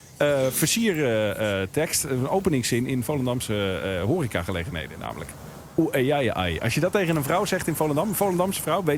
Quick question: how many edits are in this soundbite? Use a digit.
0